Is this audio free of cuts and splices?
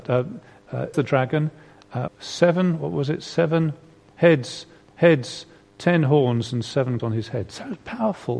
no; 4 cuts; at 0.9 s, 2.1 s, 4.9 s, 7.0 s

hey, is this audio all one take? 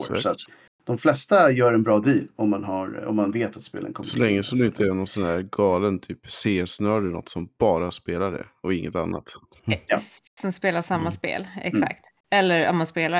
yes; 0 cuts

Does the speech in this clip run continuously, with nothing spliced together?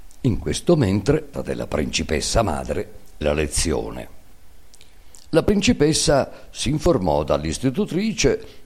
no; 2 cuts; at 1.3 s, 3.2 s

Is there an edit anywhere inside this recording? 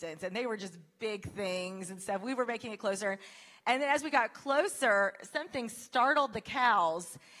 no; 0 cuts

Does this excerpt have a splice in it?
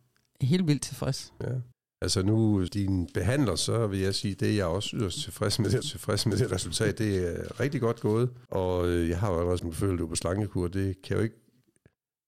yes; 5 cuts; at 1.7 s, 2.7 s, 5.8 s, 8.5 s, 9.6 s

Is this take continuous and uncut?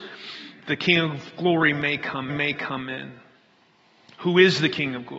no; 1 cut; at 2.3 s

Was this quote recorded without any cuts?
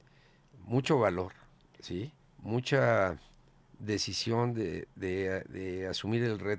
no; 1 cut; at 2.2 s

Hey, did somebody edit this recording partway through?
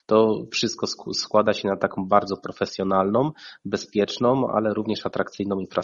no; 0 cuts

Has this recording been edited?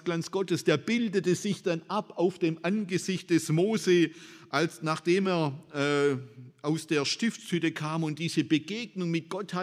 no; 0 cuts

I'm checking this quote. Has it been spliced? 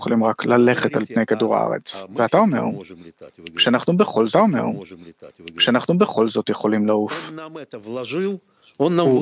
yes; 1 cut; at 4.3 s

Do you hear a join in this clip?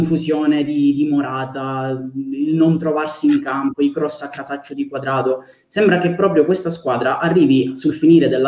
no; 0 cuts

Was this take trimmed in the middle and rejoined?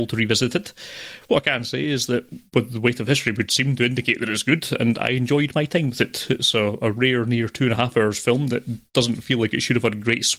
no; 0 cuts

